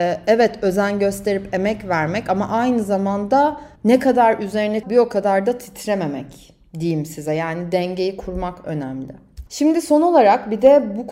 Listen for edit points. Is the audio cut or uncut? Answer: cut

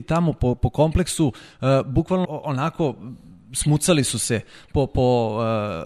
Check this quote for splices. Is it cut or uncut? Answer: cut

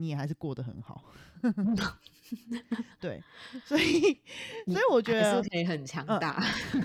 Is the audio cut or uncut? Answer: uncut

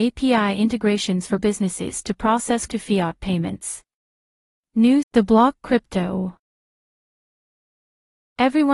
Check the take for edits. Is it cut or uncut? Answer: cut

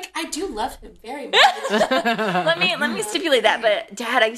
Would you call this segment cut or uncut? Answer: uncut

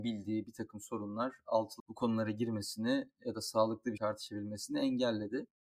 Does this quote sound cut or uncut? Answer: cut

